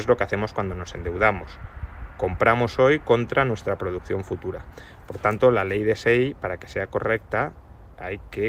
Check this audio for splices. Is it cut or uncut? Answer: uncut